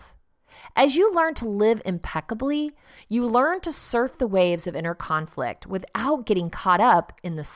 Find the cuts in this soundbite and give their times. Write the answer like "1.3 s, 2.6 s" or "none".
none